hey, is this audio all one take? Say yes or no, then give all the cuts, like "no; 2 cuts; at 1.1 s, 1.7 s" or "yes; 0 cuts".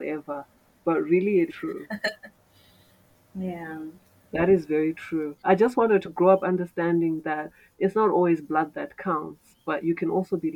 no; 1 cut; at 1.5 s